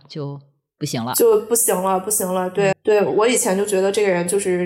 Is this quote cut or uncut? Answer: cut